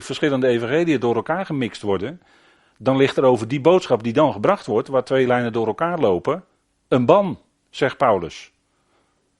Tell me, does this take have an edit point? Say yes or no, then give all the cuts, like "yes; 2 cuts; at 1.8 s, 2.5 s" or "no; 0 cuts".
no; 0 cuts